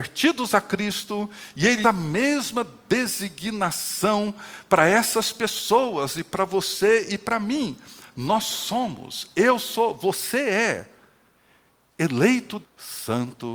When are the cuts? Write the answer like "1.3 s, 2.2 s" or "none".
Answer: 1.8 s, 12.6 s